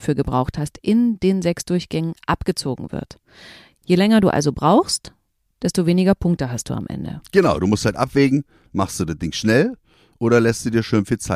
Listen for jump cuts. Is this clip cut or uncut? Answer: uncut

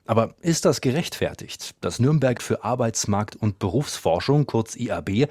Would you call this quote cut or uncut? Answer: cut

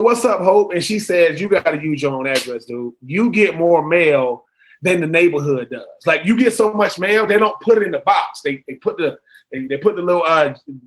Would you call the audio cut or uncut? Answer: uncut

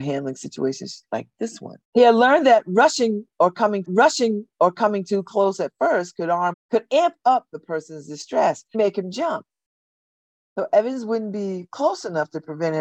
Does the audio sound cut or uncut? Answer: cut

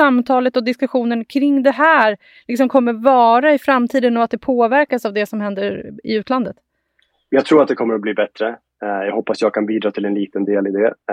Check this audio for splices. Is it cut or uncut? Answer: uncut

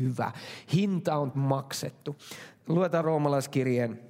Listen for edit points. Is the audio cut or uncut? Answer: cut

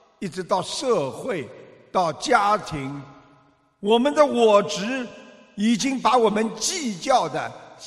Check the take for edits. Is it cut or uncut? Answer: uncut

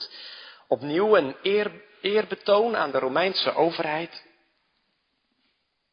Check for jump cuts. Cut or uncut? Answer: uncut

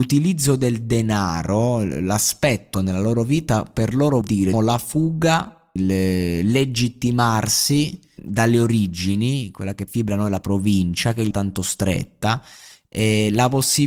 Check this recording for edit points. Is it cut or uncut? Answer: cut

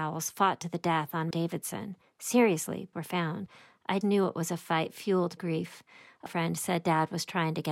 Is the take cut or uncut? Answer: cut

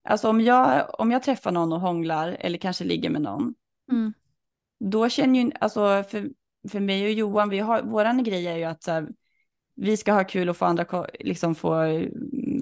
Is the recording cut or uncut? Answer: uncut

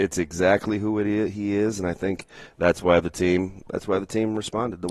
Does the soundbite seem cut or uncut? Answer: uncut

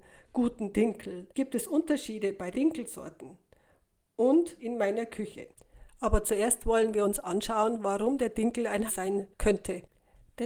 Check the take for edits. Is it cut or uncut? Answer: cut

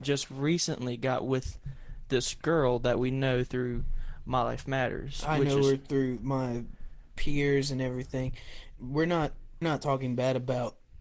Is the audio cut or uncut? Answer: cut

